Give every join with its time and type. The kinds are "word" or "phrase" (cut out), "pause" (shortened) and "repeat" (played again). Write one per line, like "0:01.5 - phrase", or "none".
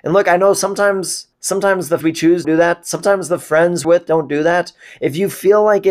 0:01.3 - pause
0:02.0 - word
0:02.4 - word
0:03.8 - phrase